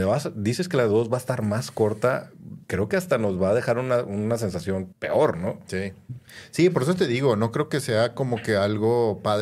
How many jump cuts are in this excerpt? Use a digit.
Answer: 2